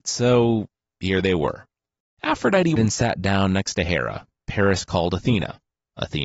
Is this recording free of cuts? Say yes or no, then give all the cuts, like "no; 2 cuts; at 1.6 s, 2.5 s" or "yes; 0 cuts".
no; 2 cuts; at 2.8 s, 4.4 s